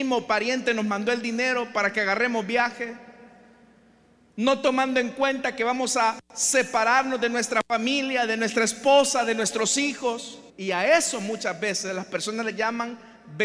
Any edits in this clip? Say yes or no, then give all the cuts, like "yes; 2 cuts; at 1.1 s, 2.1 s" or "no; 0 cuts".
yes; 2 cuts; at 6.2 s, 10.5 s